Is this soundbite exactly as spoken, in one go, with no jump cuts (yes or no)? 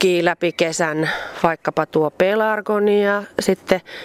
yes